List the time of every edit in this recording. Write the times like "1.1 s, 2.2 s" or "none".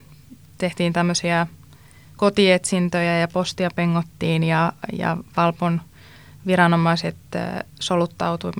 none